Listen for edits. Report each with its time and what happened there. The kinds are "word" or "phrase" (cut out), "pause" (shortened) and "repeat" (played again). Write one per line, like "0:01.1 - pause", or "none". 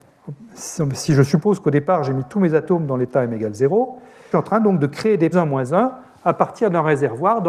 0:04.3 - phrase
0:05.3 - phrase

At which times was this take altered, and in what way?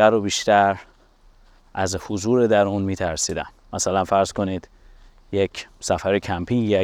none

